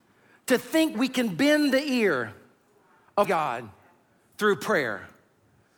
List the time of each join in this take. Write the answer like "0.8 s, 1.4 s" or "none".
0.9 s, 3.2 s